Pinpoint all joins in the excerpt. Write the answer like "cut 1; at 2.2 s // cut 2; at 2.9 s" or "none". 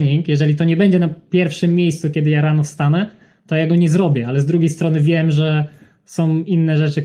none